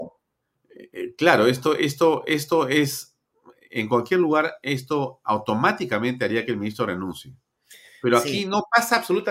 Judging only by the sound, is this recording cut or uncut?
uncut